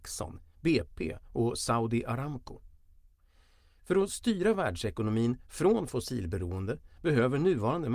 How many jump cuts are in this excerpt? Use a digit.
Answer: 0